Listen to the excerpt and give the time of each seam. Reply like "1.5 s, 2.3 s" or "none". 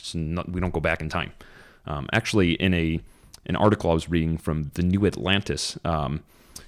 none

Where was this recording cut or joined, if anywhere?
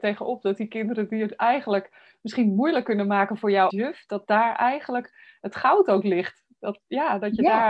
3.7 s

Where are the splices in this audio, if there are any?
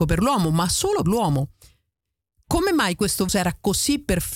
1.0 s, 3.3 s

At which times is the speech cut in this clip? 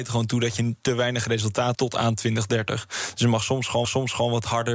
1.7 s, 3.8 s

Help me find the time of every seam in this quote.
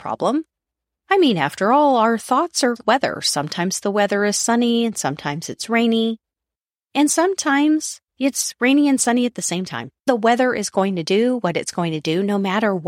2.8 s, 8.1 s, 10.0 s

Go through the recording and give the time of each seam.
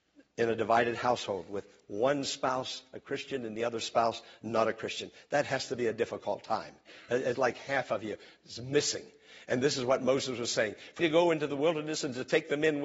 7.4 s, 11.0 s

